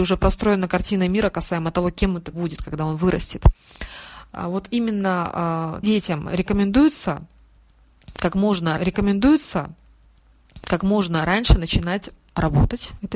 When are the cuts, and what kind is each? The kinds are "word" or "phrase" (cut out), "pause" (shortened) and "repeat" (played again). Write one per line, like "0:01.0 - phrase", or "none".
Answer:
0:02.3 - phrase
0:05.8 - word
0:08.8 - repeat